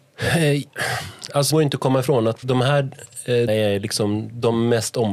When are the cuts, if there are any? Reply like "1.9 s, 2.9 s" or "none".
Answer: 1.5 s, 2.4 s, 3.5 s